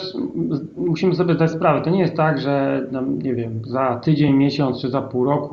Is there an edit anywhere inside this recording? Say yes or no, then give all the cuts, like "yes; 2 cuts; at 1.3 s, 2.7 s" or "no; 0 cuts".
no; 0 cuts